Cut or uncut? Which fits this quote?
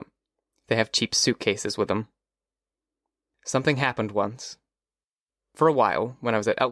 uncut